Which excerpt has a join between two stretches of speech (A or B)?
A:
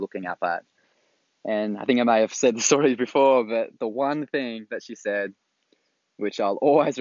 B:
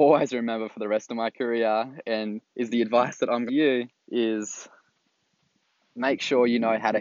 B